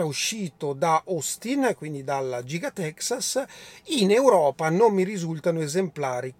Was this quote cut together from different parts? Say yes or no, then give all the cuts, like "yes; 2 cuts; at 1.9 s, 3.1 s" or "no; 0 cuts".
no; 0 cuts